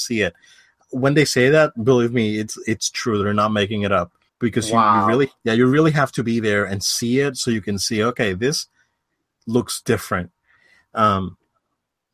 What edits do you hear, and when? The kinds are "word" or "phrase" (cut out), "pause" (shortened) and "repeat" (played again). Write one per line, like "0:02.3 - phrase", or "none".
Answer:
0:04.3 - pause
0:05.4 - pause

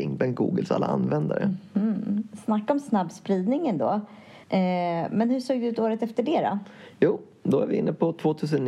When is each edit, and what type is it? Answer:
0:04.4 - pause

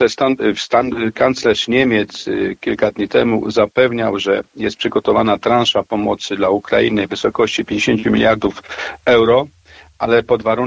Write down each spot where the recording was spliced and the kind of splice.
none

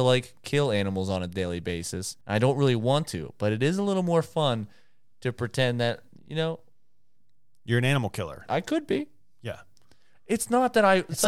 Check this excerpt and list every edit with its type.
0:02.2 - pause

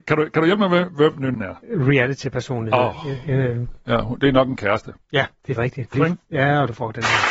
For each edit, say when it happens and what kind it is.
0:01.3 - word
0:05.6 - word
0:05.9 - word

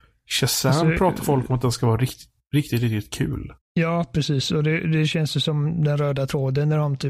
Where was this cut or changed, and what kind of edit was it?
0:03.6 - pause

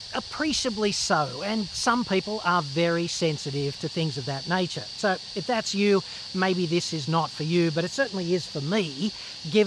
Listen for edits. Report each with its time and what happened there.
none

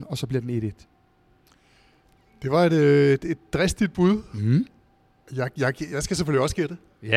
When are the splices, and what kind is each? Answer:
none

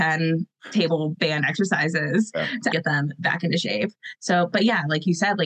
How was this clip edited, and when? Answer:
0:02.7 - word

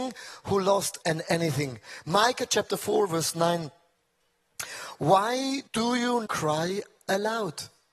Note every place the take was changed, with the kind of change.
0:01.0 - word
0:05.7 - pause
0:06.3 - word

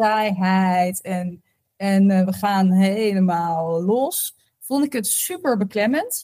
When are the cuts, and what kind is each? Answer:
none

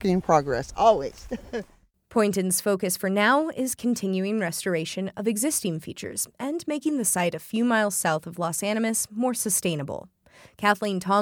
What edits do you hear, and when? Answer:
none

